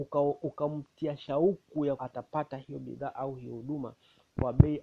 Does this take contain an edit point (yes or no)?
yes